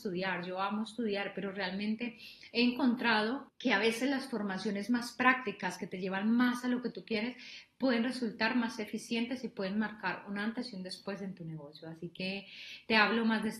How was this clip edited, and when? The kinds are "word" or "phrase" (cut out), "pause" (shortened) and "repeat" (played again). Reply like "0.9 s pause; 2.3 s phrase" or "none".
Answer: 3.5 s pause

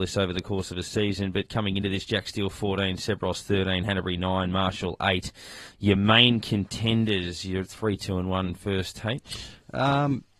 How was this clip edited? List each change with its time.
none

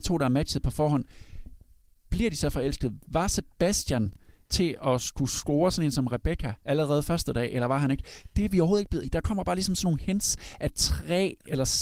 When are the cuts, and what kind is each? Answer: 4.4 s word; 6.6 s pause; 9.0 s word

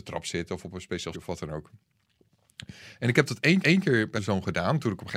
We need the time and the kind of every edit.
1.1 s word; 3.6 s repeat; 4.2 s word

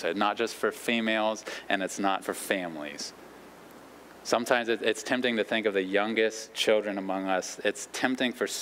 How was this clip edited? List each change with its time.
2.2 s word

